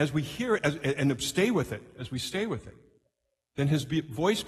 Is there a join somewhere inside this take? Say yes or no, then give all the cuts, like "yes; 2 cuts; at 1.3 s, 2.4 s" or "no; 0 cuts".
no; 0 cuts